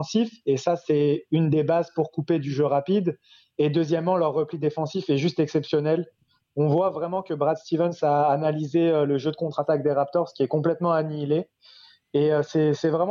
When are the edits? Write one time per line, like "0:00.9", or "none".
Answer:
none

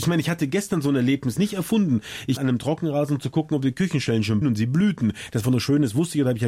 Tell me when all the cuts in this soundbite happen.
0:01.4
0:02.4
0:04.4
0:05.4

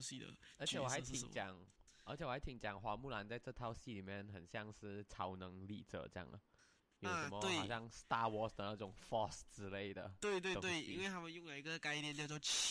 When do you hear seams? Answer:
none

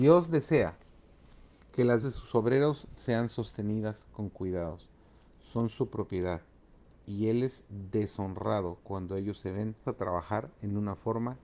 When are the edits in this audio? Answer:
0:02.0
0:09.8

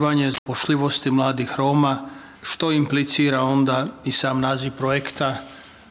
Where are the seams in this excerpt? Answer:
0:02.4

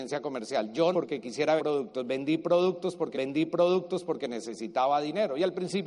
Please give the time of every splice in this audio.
0:00.9
0:01.6
0:03.1

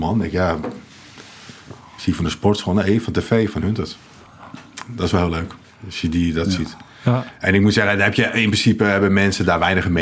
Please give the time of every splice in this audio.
0:05.6

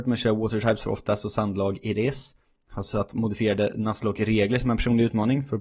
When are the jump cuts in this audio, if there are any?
none

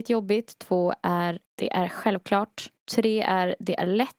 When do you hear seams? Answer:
0:01.4
0:02.8

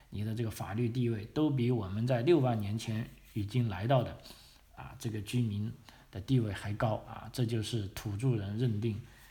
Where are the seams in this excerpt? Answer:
none

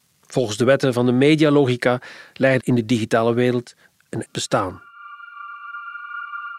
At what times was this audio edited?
0:02.6
0:04.2

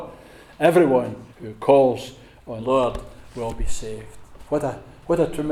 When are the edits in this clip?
0:01.3
0:02.6

